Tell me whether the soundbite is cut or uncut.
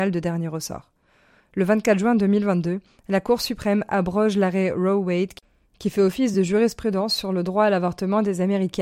uncut